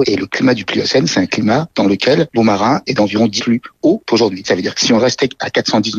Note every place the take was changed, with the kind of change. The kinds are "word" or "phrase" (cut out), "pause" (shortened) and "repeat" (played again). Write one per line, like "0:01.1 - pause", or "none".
0:02.4 - word
0:03.4 - word
0:04.7 - word